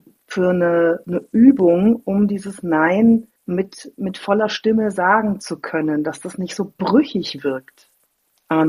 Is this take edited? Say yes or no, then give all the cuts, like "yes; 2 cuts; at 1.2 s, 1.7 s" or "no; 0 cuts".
yes; 1 cut; at 3.4 s